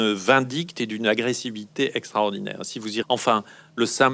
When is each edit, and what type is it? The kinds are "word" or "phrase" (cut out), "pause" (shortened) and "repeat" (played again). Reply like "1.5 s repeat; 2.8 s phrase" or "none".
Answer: 3.0 s word

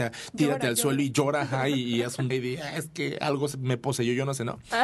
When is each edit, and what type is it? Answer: 2.3 s word

